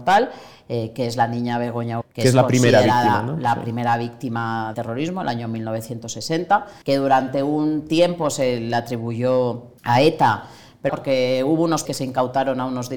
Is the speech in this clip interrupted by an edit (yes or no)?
yes